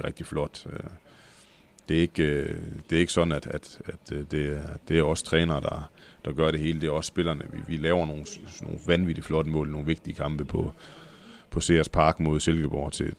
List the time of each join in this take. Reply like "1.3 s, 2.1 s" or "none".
10.5 s